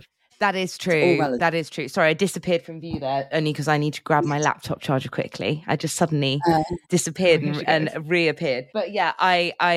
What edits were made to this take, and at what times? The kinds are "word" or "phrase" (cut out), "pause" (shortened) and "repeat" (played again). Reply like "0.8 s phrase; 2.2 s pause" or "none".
6.8 s pause; 8.7 s pause